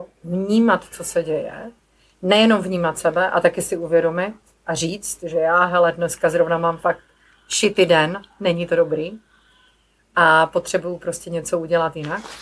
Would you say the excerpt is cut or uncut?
uncut